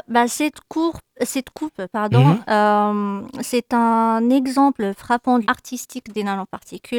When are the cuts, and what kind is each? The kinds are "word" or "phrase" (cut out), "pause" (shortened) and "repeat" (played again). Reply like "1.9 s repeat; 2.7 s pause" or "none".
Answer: 5.4 s word